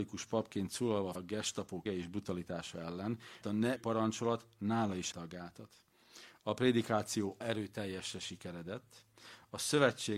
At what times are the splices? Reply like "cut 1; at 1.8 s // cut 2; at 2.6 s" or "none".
cut 1; at 1.1 s // cut 2; at 1.9 s // cut 3; at 3.4 s // cut 4; at 3.8 s // cut 5; at 5.1 s // cut 6; at 7.4 s